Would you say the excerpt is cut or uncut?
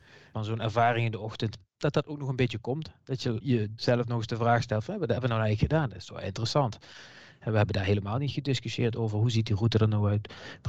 uncut